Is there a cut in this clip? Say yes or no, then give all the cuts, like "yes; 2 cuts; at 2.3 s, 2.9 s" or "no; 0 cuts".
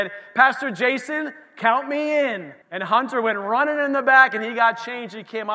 yes; 1 cut; at 2.6 s